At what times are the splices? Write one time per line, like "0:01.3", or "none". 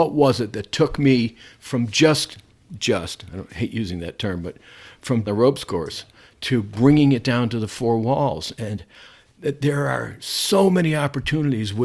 0:05.3